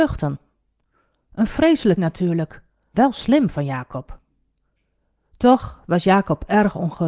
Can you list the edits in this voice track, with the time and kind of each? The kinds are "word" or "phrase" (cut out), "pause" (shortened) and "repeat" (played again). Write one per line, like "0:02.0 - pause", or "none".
0:02.0 - word
0:02.9 - word